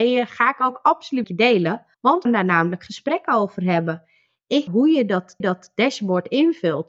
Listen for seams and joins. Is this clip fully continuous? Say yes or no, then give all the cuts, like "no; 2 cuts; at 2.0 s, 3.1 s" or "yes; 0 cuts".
no; 5 cuts; at 1.2 s, 1.9 s, 2.3 s, 4.7 s, 5.4 s